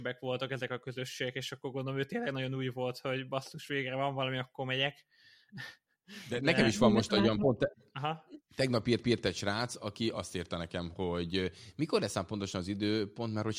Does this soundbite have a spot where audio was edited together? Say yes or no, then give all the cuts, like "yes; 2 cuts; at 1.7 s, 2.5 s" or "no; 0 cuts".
yes; 1 cut; at 9.0 s